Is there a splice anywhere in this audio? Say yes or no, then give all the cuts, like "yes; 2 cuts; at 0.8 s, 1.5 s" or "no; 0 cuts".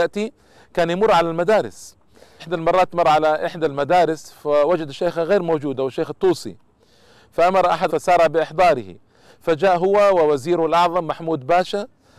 yes; 2 cuts; at 2.4 s, 7.9 s